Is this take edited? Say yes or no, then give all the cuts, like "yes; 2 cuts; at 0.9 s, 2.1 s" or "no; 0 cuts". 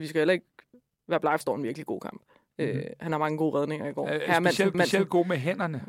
yes; 2 cuts; at 1.4 s, 4.7 s